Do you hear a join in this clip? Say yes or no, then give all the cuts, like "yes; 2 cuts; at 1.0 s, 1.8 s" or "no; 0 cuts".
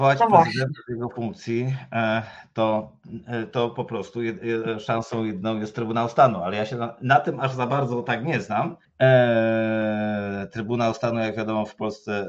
yes; 1 cut; at 8.8 s